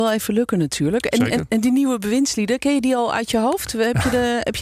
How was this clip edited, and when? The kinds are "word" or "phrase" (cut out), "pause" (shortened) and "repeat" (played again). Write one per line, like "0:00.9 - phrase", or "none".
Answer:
none

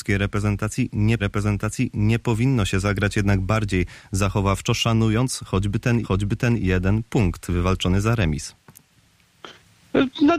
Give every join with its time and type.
0:01.2 - repeat
0:06.0 - repeat

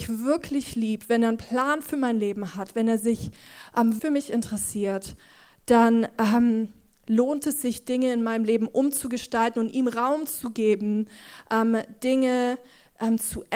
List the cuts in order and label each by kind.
0:04.0 - word

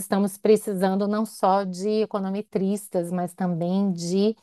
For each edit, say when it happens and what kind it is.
none

